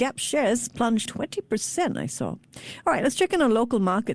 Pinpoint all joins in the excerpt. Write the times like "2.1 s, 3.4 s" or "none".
1.1 s